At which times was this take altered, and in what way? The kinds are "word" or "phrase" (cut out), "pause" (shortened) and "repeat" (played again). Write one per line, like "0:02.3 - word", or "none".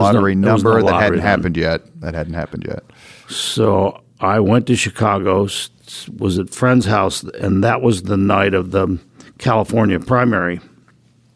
none